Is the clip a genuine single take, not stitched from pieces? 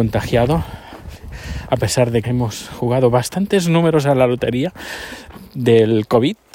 no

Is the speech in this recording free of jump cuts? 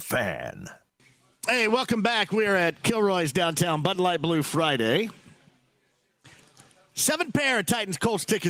yes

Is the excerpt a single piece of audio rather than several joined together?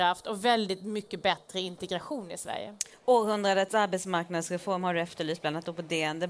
yes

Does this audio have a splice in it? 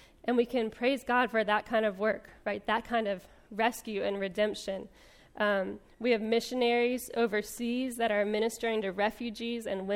no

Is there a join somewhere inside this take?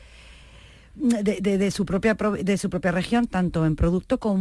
no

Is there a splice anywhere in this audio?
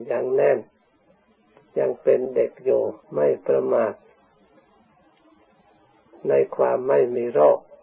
yes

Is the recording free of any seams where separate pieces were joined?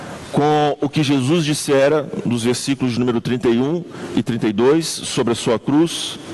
yes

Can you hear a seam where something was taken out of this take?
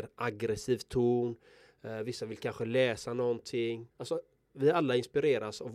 yes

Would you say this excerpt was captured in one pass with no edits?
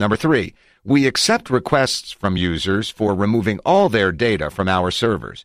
yes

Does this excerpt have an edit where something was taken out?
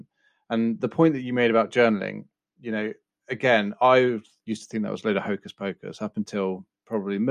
no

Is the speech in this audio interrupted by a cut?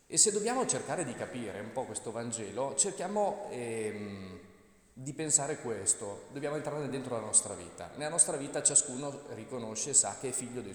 no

